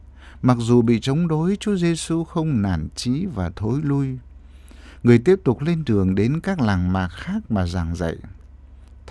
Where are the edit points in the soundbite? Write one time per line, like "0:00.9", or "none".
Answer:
none